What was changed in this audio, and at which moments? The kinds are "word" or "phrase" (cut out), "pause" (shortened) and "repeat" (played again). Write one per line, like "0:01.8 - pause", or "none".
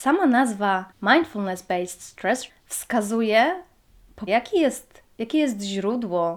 0:00.9 - pause
0:02.5 - word
0:04.3 - word